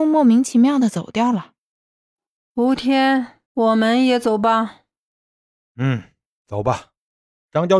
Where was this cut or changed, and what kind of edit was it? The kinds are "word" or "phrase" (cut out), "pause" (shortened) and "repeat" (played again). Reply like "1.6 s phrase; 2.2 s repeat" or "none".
3.5 s pause